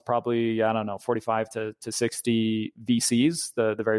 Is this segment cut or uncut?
uncut